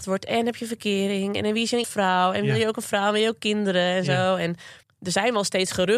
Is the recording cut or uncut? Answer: cut